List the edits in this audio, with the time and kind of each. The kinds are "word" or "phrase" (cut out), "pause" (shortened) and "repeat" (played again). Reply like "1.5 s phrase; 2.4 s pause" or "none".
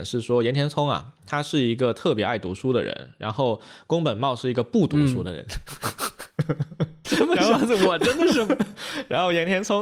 7.0 s phrase